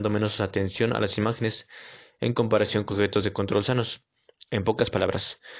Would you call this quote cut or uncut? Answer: cut